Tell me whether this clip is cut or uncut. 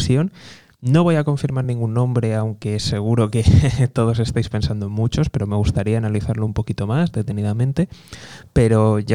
uncut